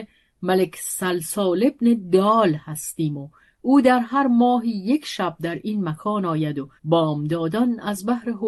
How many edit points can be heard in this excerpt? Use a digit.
1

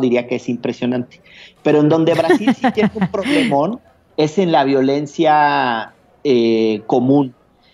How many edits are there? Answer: 1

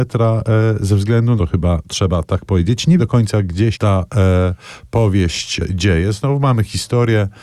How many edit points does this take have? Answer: 3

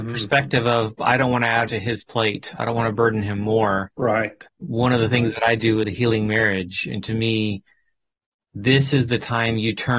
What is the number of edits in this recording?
3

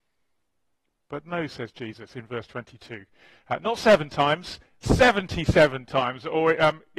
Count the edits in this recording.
0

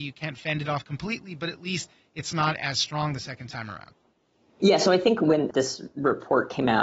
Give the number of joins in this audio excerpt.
0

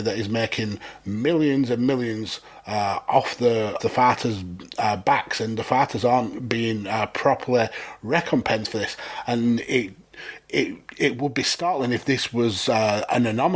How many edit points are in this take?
1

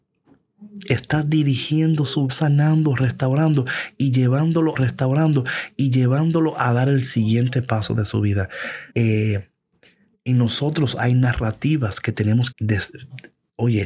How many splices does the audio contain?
4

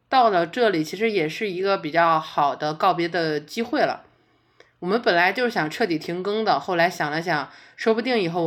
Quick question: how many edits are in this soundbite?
0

